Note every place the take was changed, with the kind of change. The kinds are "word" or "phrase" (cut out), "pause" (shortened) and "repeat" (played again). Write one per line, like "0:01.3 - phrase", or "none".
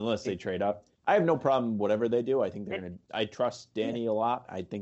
0:01.0 - pause